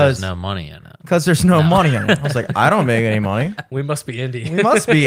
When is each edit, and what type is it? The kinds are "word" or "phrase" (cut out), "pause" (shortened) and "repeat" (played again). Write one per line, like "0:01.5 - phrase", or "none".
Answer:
none